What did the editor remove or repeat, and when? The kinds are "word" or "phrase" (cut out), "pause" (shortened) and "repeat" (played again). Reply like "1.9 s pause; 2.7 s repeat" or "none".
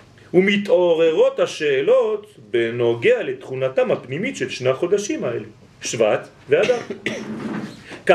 none